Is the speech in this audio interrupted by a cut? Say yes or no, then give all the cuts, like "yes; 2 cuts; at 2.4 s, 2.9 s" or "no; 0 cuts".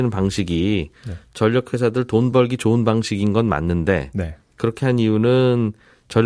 no; 0 cuts